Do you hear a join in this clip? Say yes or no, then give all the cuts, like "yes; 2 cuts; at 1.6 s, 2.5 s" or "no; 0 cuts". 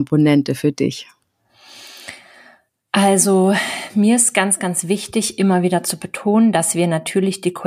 no; 0 cuts